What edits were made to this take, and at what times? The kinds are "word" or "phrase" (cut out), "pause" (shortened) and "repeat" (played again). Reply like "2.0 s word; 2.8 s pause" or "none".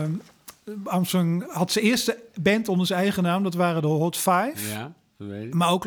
1.4 s word